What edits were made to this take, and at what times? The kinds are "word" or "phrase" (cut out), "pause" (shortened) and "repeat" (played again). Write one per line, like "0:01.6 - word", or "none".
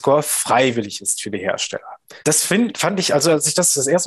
0:02.2 - pause